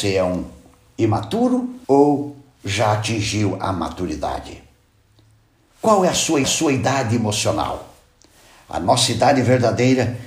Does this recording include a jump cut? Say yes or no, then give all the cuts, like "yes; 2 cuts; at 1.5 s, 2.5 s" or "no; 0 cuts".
yes; 2 cuts; at 1.8 s, 6.4 s